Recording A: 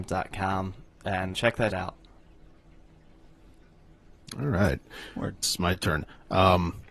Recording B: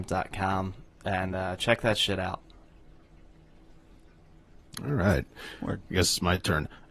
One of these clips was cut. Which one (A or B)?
A